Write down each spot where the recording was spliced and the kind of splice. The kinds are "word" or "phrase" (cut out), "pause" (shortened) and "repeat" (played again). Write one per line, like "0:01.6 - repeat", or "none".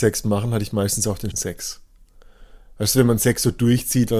0:01.3 - word